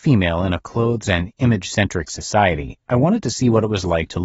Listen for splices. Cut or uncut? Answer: uncut